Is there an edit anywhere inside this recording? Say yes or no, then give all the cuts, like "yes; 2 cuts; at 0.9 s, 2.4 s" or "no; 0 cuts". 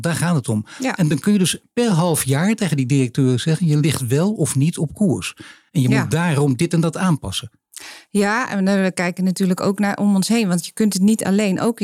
no; 0 cuts